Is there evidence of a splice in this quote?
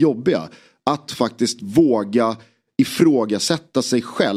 no; 0 cuts

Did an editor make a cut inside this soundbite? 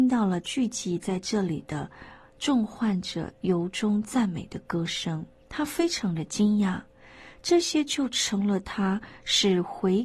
yes; 1 cut; at 5.4 s

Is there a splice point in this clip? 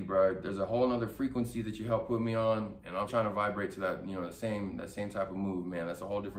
yes; 1 cut; at 3.1 s

